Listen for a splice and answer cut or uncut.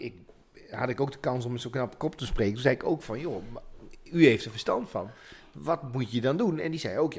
uncut